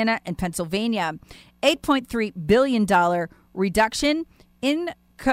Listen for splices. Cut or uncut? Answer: uncut